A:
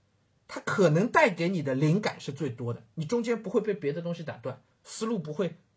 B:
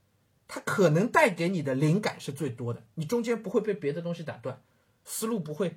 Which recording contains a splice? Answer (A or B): A